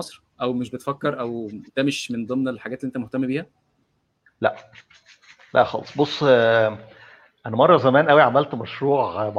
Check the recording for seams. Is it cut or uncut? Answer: uncut